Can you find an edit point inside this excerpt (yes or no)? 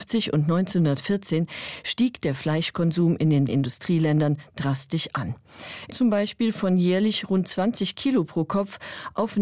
yes